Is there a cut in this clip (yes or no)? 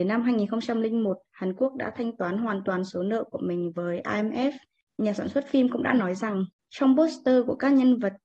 no